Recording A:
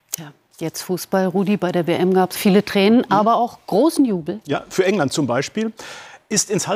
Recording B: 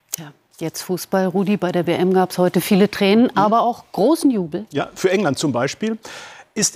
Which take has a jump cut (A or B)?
A